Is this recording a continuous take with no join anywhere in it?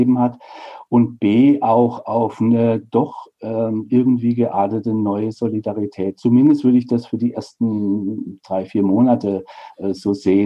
yes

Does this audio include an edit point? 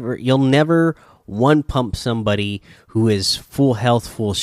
no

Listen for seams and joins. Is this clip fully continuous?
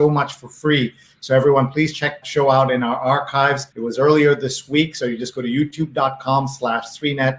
no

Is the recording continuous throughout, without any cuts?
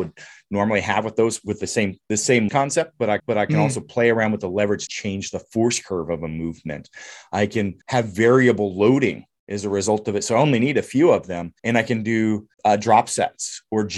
no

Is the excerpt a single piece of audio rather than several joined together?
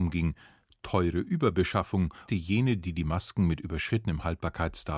no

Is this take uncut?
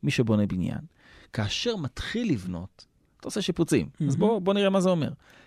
yes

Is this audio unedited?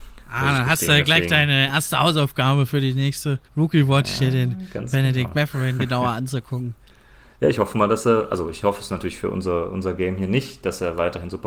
no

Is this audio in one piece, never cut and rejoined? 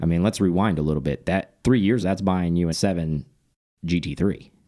no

